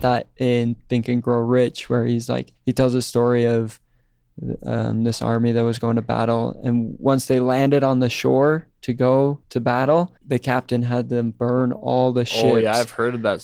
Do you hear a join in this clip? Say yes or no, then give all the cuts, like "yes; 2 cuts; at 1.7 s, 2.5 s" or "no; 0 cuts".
yes; 3 cuts; at 2.6 s, 9.4 s, 10.2 s